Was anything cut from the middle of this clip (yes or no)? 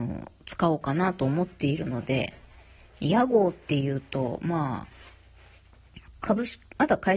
no